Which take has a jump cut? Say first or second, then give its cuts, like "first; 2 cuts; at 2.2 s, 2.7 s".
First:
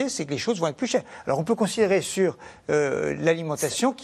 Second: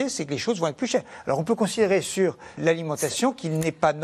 second; 1 cut; at 2.6 s